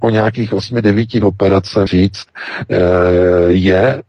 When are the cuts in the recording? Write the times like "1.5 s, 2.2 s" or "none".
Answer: 1.2 s, 1.9 s